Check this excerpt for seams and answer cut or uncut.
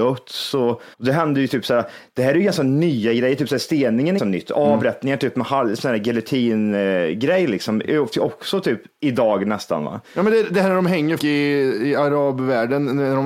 cut